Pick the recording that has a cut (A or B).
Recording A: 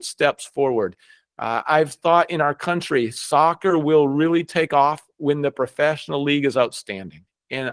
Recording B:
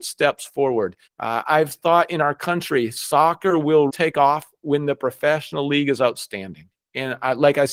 B